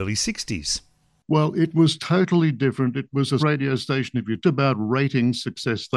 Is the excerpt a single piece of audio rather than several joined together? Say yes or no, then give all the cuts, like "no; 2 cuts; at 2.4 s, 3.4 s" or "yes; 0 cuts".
no; 2 cuts; at 3.4 s, 4.4 s